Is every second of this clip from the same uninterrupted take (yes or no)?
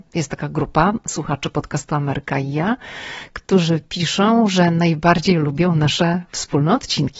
yes